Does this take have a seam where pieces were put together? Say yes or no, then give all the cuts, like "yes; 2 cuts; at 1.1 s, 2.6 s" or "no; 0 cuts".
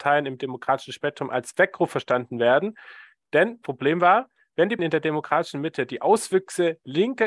yes; 2 cuts; at 3.6 s, 4.8 s